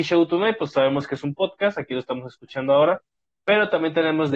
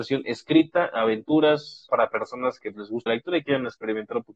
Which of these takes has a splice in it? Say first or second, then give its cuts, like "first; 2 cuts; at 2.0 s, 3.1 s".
second; 3 cuts; at 1.9 s, 2.7 s, 3.1 s